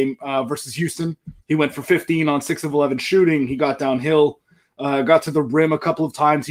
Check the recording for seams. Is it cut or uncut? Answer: cut